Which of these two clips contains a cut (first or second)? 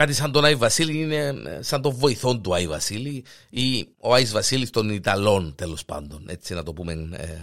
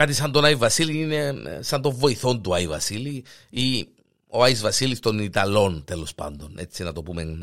first